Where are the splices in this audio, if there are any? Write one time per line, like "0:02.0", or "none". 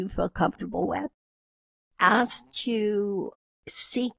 none